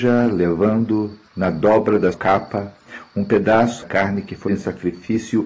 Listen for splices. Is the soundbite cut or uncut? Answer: cut